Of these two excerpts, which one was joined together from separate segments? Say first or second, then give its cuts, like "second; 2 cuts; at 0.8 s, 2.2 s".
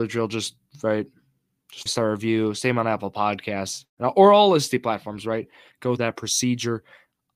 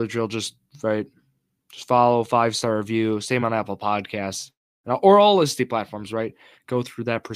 first; 3 cuts; at 1.9 s, 3.9 s, 6.0 s